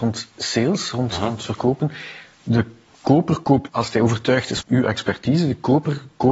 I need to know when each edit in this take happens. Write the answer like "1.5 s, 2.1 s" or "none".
2.9 s, 3.7 s, 4.6 s

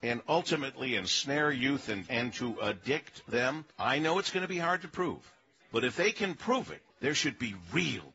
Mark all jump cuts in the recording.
2.1 s, 3.7 s, 5.6 s, 6.9 s

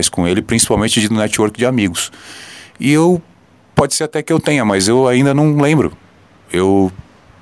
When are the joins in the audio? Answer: none

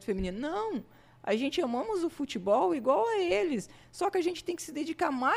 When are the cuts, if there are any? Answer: none

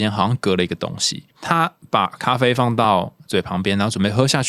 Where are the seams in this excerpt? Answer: 1.3 s

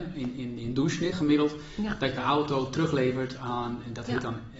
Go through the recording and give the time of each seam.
1.1 s, 2.2 s

